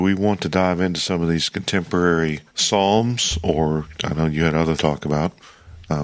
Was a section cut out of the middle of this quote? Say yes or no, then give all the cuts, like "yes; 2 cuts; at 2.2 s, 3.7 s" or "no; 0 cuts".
yes; 3 cuts; at 2.5 s, 3.9 s, 4.8 s